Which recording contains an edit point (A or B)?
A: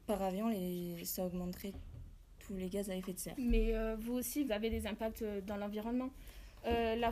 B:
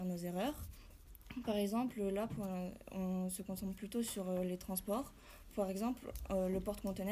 A